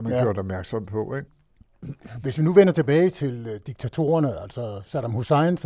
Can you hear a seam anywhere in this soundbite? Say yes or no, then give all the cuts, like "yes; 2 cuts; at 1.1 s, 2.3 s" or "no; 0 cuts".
no; 0 cuts